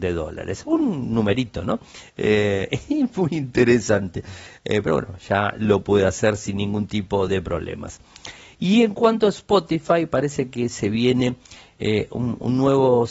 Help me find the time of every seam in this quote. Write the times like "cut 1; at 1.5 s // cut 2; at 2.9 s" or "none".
none